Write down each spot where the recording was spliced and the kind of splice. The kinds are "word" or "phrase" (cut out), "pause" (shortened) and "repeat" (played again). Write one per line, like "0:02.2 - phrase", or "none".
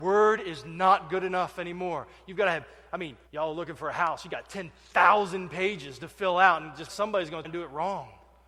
0:03.3 - pause
0:06.9 - word
0:07.4 - word

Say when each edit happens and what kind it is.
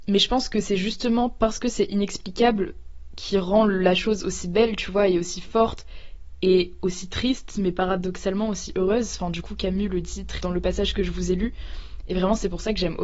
0:10.4 - word

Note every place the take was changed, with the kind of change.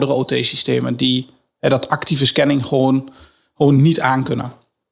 none

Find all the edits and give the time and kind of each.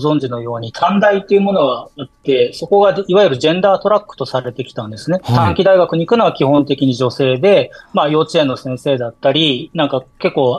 0:07.8 - pause

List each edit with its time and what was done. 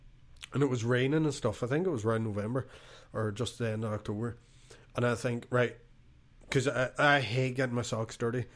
none

